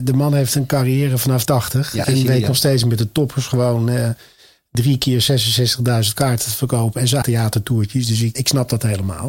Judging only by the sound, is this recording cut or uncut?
cut